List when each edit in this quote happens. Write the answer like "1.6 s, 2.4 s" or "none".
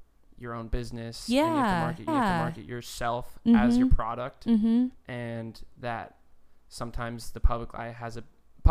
2.1 s